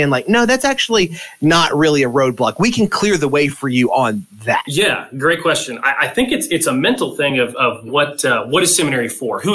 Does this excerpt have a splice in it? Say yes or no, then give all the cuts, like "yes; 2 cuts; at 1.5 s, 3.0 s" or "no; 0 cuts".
no; 0 cuts